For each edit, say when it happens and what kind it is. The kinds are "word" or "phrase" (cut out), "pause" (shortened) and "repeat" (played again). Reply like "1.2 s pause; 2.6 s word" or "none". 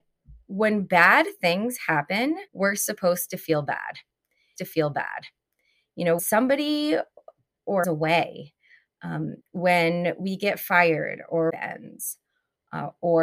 2.5 s pause; 4.6 s repeat; 6.2 s word; 7.8 s phrase; 9.4 s pause; 11.5 s phrase